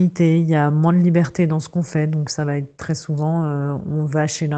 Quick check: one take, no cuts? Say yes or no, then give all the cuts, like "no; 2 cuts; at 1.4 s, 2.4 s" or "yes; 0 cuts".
yes; 0 cuts